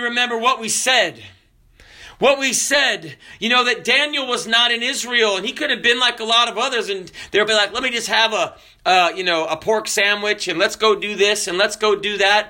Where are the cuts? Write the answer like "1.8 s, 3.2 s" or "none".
7.5 s